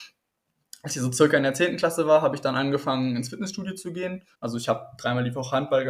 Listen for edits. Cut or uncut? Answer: cut